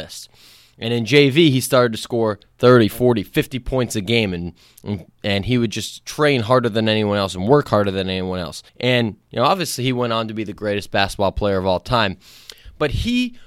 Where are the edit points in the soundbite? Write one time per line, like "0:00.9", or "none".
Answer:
0:08.7